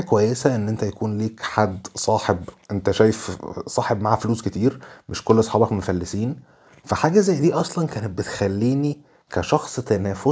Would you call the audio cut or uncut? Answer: uncut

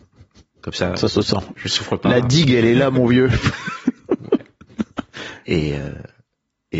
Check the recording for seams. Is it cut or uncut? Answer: uncut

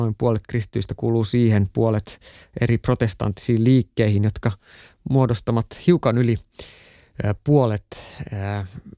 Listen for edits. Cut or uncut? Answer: uncut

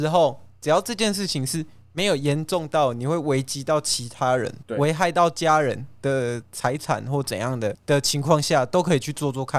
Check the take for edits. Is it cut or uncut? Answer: uncut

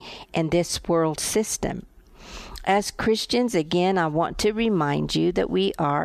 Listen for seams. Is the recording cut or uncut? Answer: uncut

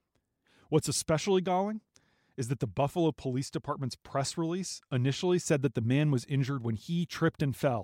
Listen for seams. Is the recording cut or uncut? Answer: uncut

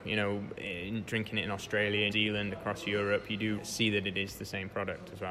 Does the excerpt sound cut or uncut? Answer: cut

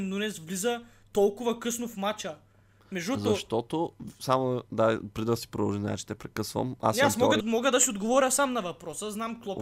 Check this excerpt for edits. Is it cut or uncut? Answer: cut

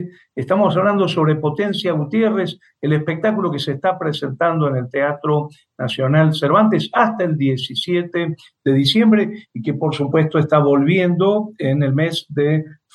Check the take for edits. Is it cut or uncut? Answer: uncut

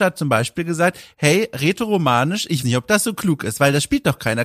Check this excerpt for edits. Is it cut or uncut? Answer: cut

